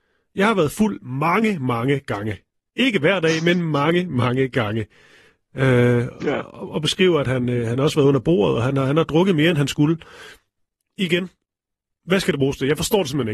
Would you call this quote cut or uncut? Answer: uncut